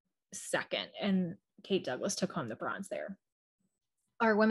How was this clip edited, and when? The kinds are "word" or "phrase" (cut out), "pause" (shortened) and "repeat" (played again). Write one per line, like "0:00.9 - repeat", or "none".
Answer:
none